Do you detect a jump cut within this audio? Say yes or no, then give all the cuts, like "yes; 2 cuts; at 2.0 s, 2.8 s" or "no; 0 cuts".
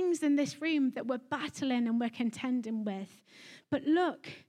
no; 0 cuts